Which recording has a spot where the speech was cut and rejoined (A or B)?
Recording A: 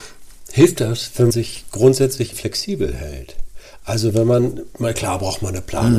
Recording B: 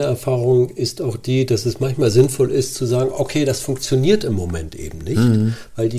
A